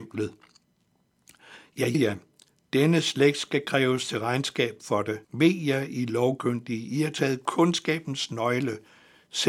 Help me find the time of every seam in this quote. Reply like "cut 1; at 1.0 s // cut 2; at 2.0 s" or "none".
cut 1; at 1.9 s // cut 2; at 5.2 s